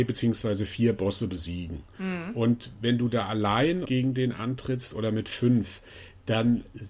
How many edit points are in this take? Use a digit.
1